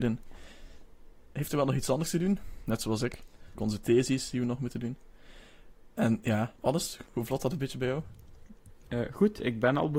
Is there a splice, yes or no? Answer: yes